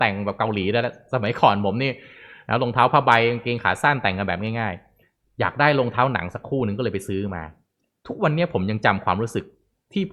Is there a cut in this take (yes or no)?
no